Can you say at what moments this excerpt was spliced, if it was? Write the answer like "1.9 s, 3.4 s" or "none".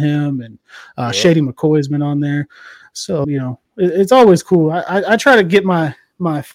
3.2 s